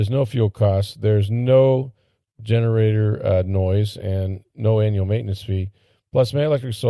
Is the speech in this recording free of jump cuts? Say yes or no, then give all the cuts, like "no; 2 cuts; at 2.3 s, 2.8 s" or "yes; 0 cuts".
yes; 0 cuts